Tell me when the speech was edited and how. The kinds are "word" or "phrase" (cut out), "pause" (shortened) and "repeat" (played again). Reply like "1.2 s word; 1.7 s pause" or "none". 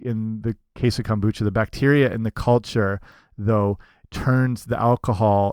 none

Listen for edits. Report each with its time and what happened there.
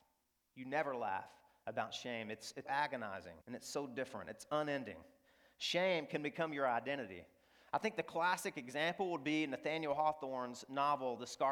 2.7 s word; 3.4 s pause

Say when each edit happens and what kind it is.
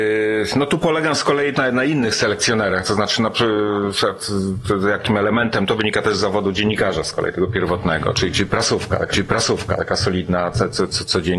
1.5 s word; 9.1 s repeat

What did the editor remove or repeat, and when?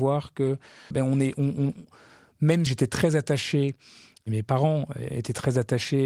0.9 s word; 2.7 s word

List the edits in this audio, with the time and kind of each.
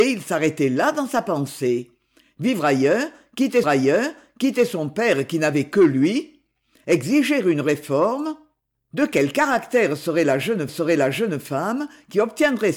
3.6 s repeat; 10.7 s repeat

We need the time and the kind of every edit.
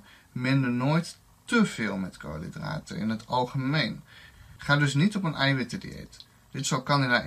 none

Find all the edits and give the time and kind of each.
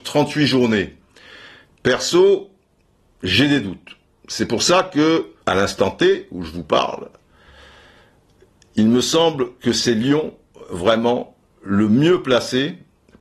5.4 s pause

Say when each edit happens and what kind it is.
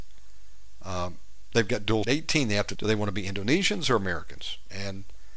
2.0 s phrase; 2.8 s word

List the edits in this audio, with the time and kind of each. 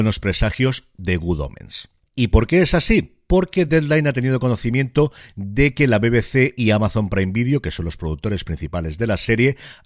none

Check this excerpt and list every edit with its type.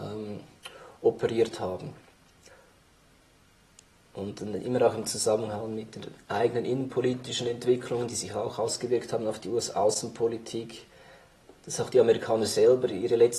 none

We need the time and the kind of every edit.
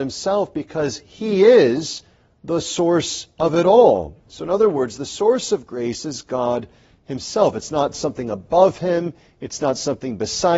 none

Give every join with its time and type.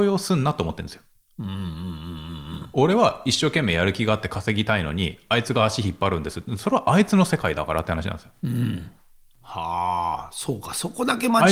none

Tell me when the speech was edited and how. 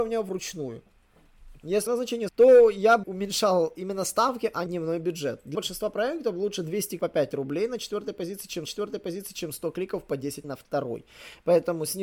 1.9 s phrase; 2.3 s word; 3.0 s word; 4.7 s word; 5.5 s word; 7.0 s word; 8.7 s repeat; 10.4 s word

